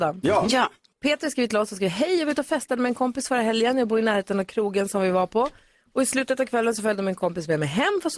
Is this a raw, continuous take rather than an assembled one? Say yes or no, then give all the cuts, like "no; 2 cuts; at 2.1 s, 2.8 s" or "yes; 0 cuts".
yes; 0 cuts